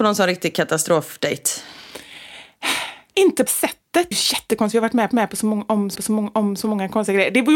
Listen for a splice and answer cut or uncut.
cut